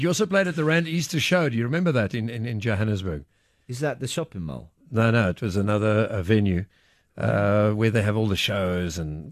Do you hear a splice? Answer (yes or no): no